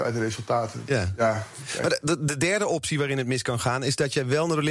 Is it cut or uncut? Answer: uncut